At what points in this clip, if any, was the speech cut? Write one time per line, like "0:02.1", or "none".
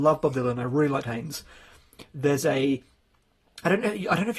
0:01.0